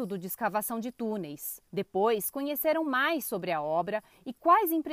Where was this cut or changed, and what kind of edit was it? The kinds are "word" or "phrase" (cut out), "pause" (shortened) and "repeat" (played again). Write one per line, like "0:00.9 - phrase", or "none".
0:01.7 - pause